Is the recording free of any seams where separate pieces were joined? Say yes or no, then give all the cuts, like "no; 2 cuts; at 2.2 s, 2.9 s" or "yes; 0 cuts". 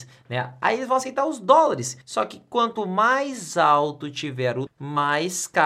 no; 2 cuts; at 2.0 s, 4.7 s